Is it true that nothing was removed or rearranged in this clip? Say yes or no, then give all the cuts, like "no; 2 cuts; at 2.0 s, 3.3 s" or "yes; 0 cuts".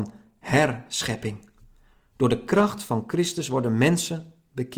yes; 0 cuts